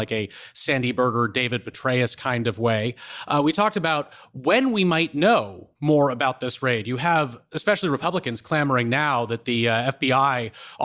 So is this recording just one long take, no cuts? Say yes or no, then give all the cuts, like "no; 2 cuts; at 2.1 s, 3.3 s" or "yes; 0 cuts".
yes; 0 cuts